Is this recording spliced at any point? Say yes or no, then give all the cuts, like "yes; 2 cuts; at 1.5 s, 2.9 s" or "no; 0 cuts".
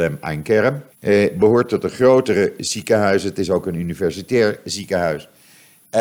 yes; 1 cut; at 0.9 s